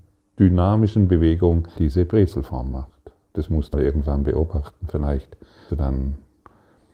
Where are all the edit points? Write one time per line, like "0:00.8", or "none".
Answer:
0:01.8
0:03.7
0:05.7